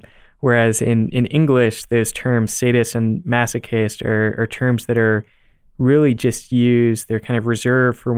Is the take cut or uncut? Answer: uncut